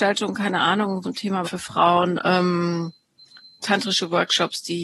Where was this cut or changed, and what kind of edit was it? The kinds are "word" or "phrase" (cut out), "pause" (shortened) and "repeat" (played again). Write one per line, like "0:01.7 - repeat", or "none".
0:01.0 - word
0:01.4 - word